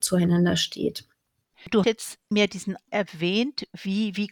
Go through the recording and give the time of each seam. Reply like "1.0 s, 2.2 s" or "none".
1.8 s, 2.3 s, 2.9 s